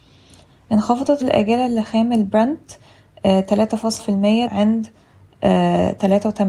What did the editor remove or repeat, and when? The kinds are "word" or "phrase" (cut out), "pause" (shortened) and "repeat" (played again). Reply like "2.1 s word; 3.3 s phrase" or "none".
1.2 s word; 4.0 s word; 4.5 s word